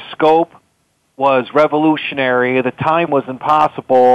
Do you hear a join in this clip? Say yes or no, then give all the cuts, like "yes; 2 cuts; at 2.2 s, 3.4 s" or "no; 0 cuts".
yes; 1 cut; at 3.1 s